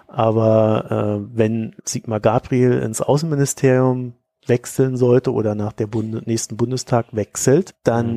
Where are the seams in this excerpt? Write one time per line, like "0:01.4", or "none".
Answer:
0:01.8